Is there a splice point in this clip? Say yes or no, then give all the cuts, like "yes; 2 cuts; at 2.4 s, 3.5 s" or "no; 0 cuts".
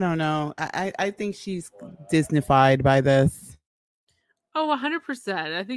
no; 0 cuts